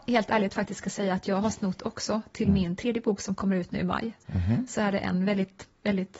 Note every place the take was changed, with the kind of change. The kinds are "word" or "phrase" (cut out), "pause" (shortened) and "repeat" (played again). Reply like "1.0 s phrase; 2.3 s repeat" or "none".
none